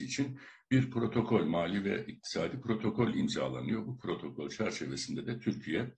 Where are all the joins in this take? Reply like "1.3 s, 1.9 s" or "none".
none